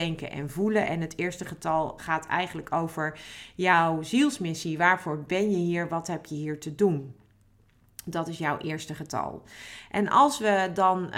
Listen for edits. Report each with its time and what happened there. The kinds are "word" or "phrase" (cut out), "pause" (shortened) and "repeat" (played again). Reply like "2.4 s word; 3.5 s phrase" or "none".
2.0 s word